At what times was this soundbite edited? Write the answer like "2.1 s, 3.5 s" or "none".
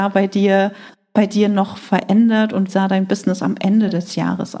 2.7 s